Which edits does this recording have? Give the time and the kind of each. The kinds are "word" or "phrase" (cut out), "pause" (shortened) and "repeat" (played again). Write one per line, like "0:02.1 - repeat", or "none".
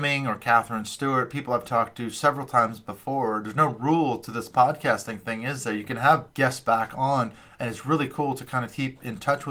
0:06.3 - pause